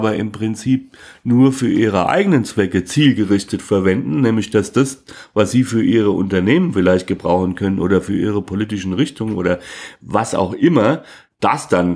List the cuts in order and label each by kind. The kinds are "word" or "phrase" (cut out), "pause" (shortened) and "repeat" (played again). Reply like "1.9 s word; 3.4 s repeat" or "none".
none

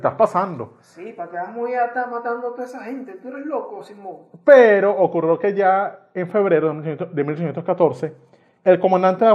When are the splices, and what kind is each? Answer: none

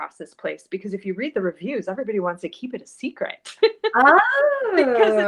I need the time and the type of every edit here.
none

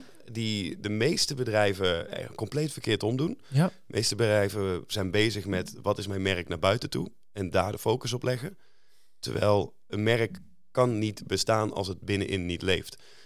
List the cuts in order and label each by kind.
none

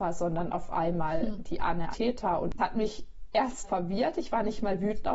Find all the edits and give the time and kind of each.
1.9 s word; 2.6 s word; 3.6 s word

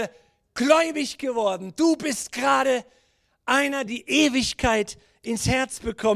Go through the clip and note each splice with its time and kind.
3.9 s word

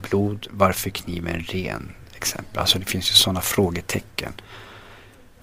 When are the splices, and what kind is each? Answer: none

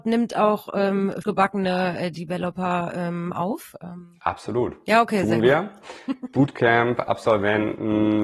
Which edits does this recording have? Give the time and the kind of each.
1.2 s word

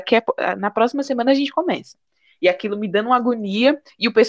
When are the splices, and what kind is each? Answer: none

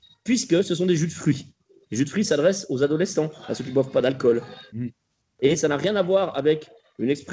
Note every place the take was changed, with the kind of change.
none

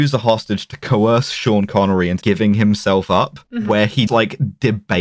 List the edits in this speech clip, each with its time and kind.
2.2 s word; 3.4 s pause; 4.1 s word

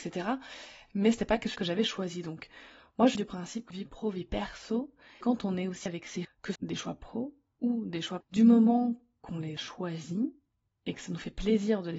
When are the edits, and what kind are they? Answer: 1.5 s word; 3.1 s word; 3.7 s word; 5.2 s word; 5.9 s word; 6.2 s word; 6.6 s word; 8.2 s word; 9.6 s word

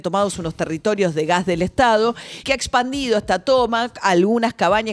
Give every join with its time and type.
2.4 s word

